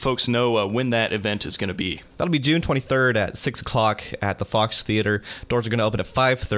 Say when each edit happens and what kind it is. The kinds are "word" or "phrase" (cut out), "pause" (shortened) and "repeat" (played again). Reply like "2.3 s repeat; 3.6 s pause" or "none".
none